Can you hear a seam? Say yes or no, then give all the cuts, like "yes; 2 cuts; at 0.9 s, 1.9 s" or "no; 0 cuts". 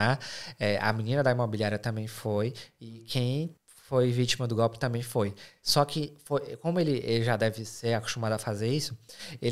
yes; 1 cut; at 3.6 s